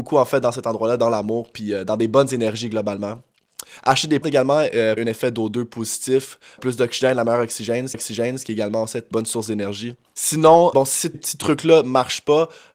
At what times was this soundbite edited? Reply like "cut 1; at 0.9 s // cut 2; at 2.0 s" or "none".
cut 1; at 4.2 s // cut 2; at 5.0 s // cut 3; at 6.6 s // cut 4; at 7.9 s // cut 5; at 9.1 s // cut 6; at 10.7 s // cut 7; at 11.1 s